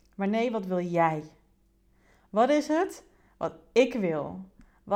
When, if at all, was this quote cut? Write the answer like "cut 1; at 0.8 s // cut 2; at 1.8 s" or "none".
none